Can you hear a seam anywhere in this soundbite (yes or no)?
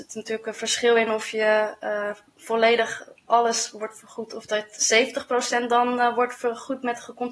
no